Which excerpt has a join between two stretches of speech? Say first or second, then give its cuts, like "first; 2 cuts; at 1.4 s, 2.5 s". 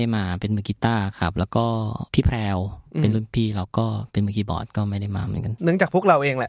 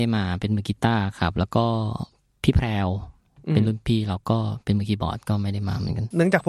first; 2 cuts; at 2.1 s, 2.9 s